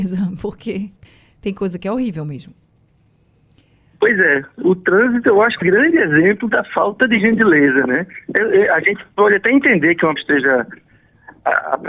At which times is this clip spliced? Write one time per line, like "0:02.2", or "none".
0:01.0
0:05.6
0:10.2